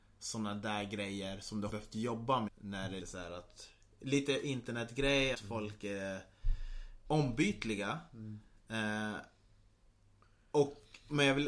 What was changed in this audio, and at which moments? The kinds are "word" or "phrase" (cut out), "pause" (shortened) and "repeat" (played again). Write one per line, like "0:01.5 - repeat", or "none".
0:01.7 - word
0:02.5 - word
0:03.0 - word
0:05.3 - word
0:07.1 - word